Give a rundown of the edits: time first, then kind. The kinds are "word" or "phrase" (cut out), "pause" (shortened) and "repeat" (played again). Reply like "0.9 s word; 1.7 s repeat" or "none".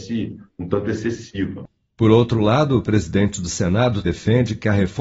4.0 s word